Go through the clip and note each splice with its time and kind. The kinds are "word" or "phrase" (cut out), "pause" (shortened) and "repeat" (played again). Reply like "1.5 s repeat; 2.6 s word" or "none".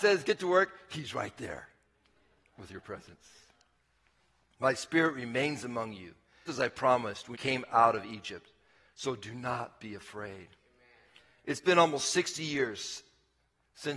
6.5 s word; 7.3 s word

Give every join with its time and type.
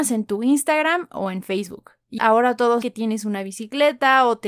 2.2 s word; 2.8 s word

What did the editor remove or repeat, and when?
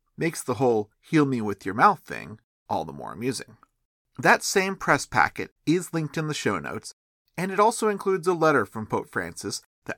0.9 s pause; 5.6 s pause

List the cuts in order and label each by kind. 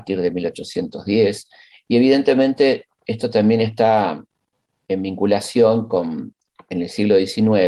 none

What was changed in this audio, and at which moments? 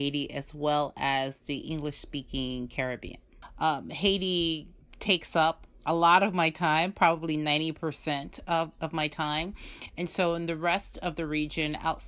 none

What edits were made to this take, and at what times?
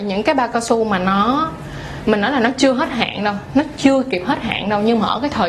none

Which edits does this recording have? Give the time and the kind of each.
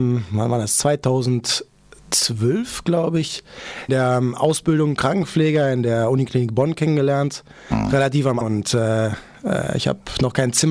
3.9 s word; 5.0 s word; 8.4 s word

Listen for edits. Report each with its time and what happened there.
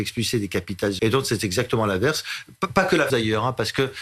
1.0 s word; 3.1 s word

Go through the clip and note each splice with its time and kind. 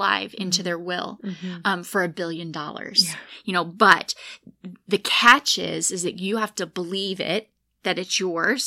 none

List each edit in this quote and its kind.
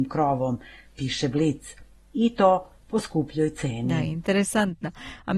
none

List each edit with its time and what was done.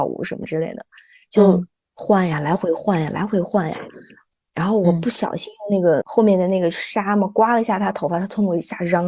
6.0 s word

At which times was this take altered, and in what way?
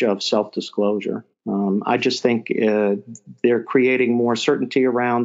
1.3 s pause

